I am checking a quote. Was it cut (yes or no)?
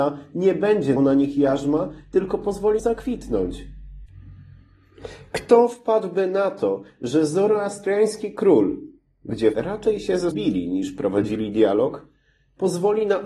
yes